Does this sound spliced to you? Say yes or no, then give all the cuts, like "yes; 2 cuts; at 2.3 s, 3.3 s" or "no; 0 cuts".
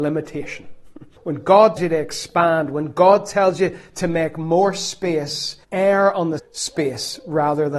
yes; 4 cuts; at 1.2 s, 1.8 s, 5.6 s, 6.4 s